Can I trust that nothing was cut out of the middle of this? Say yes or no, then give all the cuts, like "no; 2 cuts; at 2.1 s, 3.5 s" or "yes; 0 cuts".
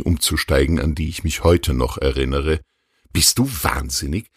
yes; 0 cuts